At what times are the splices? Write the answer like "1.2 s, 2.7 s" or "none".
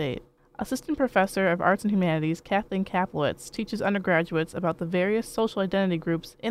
none